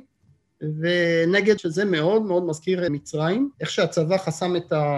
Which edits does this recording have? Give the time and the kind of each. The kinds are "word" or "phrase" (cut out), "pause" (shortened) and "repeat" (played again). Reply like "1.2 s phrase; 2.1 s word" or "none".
1.6 s phrase; 2.9 s word; 3.5 s pause